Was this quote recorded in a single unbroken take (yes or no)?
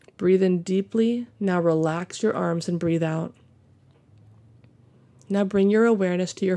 no